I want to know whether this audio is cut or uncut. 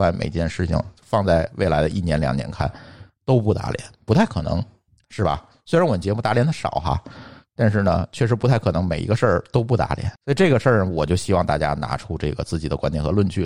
cut